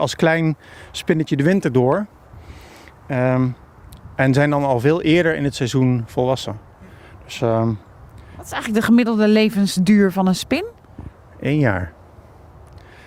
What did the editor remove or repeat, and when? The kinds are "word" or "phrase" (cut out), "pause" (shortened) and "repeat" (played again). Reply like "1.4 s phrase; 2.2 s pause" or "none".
none